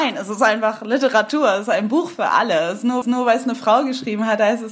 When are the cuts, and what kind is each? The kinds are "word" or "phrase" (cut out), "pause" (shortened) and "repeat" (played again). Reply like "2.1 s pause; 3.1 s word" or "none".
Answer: 3.0 s repeat